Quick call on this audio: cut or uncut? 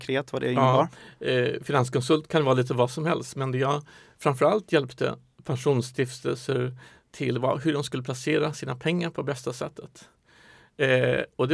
uncut